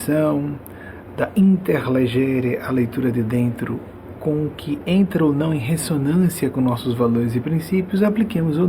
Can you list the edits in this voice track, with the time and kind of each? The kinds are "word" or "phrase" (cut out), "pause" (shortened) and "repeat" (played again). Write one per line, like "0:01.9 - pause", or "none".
none